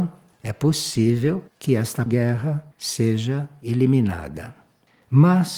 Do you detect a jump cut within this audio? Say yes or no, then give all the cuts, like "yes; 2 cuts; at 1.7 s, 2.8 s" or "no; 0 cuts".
yes; 3 cuts; at 1.5 s, 2.1 s, 2.7 s